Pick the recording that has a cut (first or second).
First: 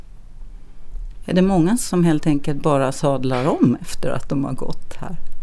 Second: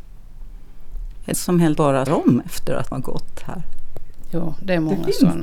second